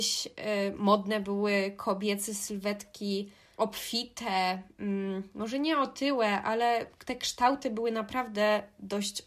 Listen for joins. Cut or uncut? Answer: uncut